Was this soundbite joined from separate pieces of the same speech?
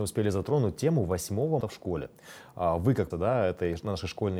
yes; 2 cuts; at 1.6 s, 3.1 s

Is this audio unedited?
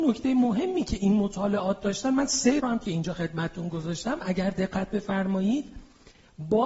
no; 1 cut; at 2.6 s

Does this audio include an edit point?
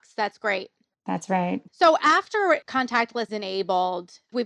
yes; 2 cuts; at 1.7 s, 3.3 s

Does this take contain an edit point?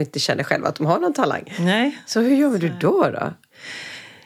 no; 0 cuts

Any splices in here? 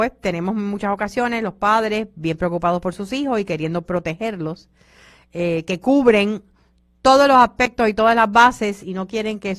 no; 0 cuts

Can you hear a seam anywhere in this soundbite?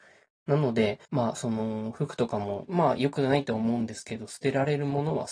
yes; 2 cuts; at 1.0 s, 2.7 s

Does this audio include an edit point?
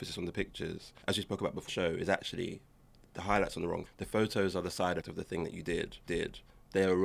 yes; 5 cuts; at 1.0 s, 1.7 s, 3.8 s, 5.0 s, 6.1 s

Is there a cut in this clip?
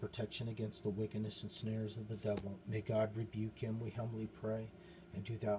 no; 0 cuts

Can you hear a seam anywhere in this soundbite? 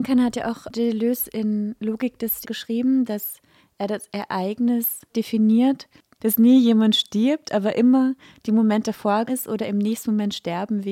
yes; 3 cuts; at 2.4 s, 5.1 s, 9.3 s

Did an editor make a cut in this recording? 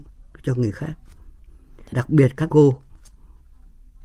yes; 2 cuts; at 1.9 s, 2.5 s

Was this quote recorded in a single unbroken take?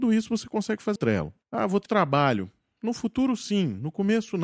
no; 3 cuts; at 1.0 s, 1.4 s, 1.9 s

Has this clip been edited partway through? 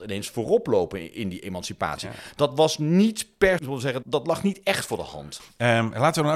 yes; 2 cuts; at 3.6 s, 4.0 s

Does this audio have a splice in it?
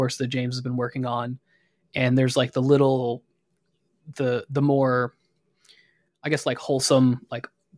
no; 0 cuts

